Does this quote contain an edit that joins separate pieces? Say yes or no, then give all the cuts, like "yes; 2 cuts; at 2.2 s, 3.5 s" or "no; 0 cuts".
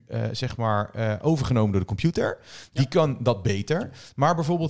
no; 0 cuts